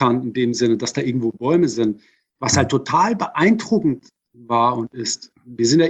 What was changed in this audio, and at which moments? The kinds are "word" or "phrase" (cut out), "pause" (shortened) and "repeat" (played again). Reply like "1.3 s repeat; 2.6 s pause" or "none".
none